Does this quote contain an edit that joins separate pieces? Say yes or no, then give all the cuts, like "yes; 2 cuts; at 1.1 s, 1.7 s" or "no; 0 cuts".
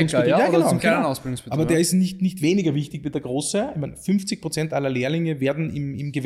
no; 0 cuts